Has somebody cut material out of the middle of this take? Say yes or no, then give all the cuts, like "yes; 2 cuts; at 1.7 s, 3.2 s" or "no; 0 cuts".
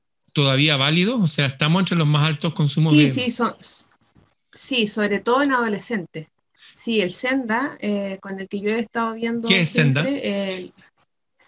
no; 0 cuts